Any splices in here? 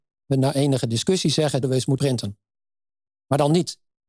yes; 2 cuts; at 1.6 s, 2.0 s

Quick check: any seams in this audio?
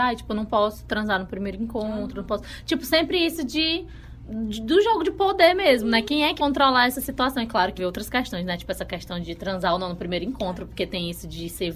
yes; 3 cuts; at 6.4 s, 7.8 s, 9.2 s

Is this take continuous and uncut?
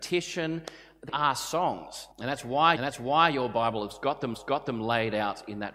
no; 4 cuts; at 1.1 s, 2.1 s, 2.8 s, 4.3 s

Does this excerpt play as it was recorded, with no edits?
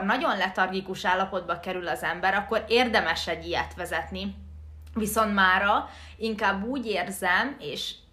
yes; 0 cuts

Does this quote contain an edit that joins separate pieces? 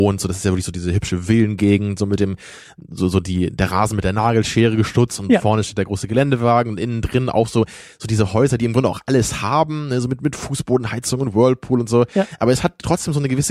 no; 0 cuts

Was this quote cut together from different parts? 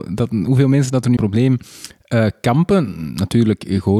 yes; 1 cut; at 1.2 s

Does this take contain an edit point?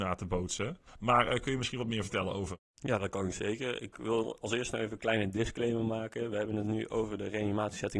yes; 1 cut; at 2.6 s

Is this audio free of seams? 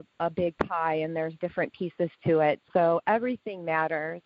yes; 0 cuts

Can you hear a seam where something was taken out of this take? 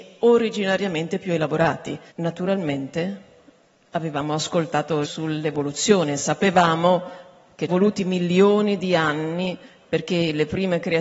yes; 3 cuts; at 2.1 s, 5.0 s, 7.7 s

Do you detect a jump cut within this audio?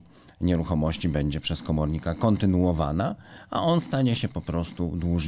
no; 0 cuts

